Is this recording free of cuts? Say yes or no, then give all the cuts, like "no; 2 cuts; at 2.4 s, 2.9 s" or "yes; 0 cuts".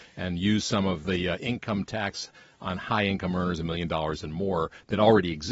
yes; 0 cuts